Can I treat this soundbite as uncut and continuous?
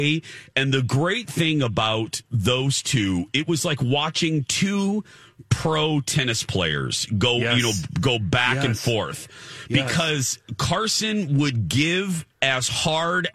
no; 1 cut; at 12.3 s

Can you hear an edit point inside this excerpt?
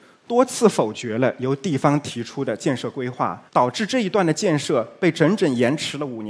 yes; 1 cut; at 3.5 s

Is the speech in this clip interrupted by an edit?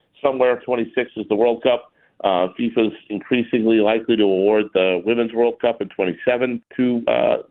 no; 0 cuts

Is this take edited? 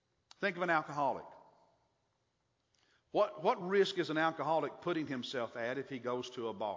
no; 0 cuts

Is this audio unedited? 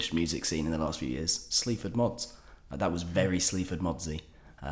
yes; 0 cuts

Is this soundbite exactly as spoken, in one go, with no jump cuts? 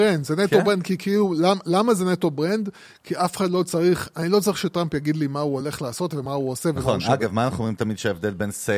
yes; 0 cuts

